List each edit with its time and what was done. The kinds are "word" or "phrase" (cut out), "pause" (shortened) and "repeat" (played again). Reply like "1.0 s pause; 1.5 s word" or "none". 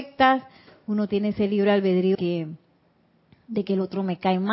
1.1 s word; 2.1 s word

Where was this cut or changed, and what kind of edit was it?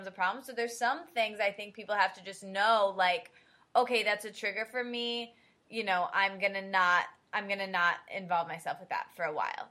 none

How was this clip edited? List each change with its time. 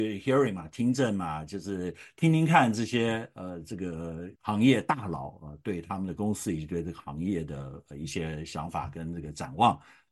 4.4 s pause

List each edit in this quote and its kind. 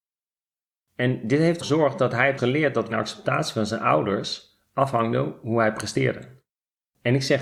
1.6 s word; 2.4 s word; 2.9 s word

